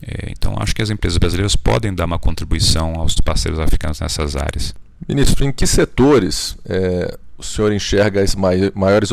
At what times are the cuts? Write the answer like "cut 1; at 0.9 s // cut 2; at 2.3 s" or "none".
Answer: cut 1; at 3.2 s